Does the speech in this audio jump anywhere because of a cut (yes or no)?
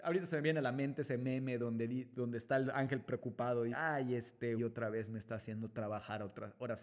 yes